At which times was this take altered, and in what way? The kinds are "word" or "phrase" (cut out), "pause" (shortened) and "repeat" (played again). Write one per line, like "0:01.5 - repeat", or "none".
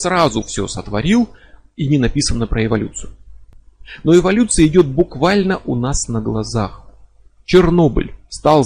none